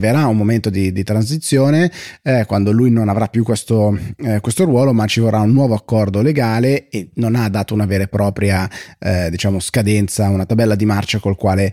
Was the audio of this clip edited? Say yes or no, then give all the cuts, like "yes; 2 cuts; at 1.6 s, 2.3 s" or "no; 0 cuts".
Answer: no; 0 cuts